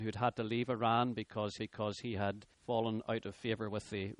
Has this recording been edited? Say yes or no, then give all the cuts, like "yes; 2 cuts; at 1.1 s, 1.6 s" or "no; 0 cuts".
yes; 2 cuts; at 1.6 s, 2.5 s